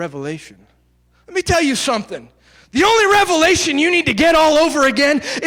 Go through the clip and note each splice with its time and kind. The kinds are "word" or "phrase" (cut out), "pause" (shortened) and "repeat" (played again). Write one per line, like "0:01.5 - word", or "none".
none